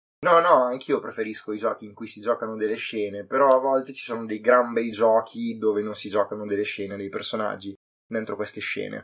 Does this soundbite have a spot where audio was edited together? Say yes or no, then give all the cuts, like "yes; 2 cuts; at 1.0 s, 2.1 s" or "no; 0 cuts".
no; 0 cuts